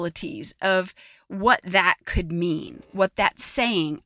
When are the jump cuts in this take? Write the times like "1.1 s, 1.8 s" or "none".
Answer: none